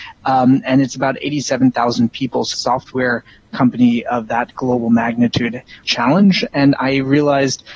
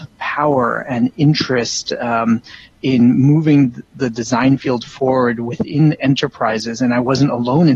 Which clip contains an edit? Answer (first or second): first